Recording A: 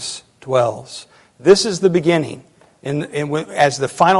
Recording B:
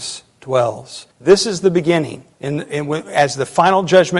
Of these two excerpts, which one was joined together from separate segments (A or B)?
B